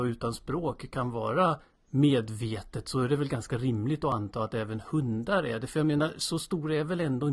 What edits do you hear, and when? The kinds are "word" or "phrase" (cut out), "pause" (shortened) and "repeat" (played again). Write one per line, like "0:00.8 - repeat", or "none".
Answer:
none